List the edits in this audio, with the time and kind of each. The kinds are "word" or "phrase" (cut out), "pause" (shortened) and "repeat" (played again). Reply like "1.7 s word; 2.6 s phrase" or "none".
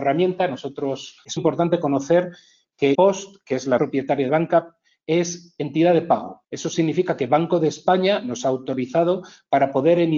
1.4 s word; 2.9 s word; 3.8 s word; 4.3 s word; 6.4 s pause